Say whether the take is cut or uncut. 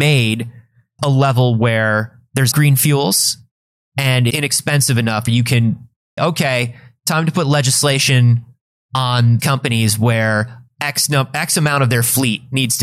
cut